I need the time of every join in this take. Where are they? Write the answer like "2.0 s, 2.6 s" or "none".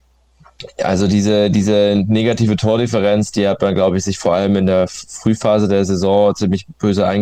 none